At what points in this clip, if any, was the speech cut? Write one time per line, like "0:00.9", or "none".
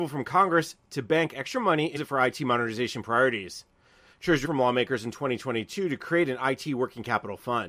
0:02.0
0:04.4